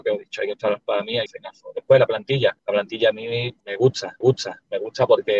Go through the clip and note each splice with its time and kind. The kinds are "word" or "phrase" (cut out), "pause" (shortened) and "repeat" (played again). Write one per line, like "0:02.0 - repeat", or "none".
0:01.3 - phrase
0:02.6 - pause
0:03.6 - pause
0:04.2 - repeat